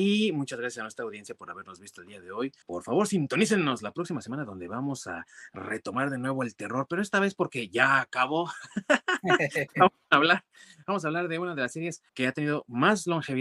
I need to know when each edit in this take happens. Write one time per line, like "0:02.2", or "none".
0:02.6
0:12.1